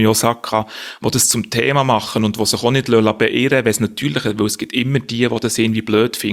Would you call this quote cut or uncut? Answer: uncut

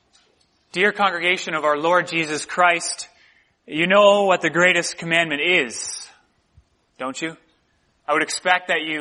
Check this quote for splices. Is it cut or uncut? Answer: uncut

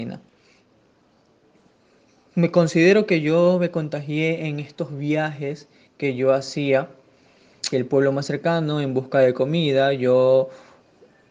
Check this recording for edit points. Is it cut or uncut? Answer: cut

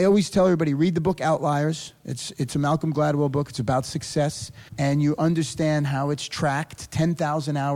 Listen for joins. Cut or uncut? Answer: cut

